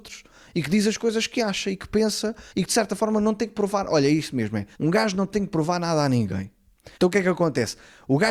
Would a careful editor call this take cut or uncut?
cut